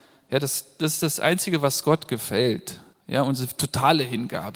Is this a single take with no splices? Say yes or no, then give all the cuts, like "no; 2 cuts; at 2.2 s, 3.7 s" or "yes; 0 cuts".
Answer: no; 1 cut; at 2.9 s